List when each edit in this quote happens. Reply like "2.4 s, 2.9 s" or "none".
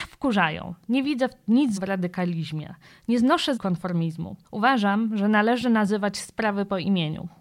1.8 s, 3.6 s, 4.4 s